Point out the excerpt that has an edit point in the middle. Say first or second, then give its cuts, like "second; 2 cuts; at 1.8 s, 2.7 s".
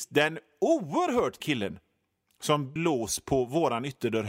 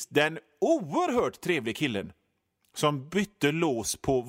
first; 2 cuts; at 1.4 s, 2.8 s